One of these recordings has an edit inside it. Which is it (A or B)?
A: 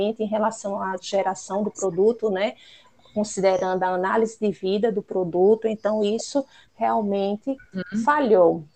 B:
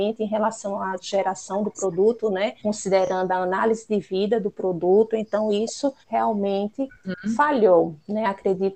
B